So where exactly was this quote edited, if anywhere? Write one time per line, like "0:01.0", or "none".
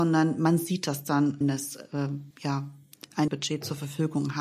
0:01.4
0:02.3
0:03.3